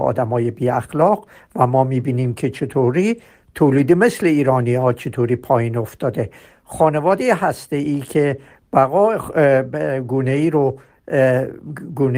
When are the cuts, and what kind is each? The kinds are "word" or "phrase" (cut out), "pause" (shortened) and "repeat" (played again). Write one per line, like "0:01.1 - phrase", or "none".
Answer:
none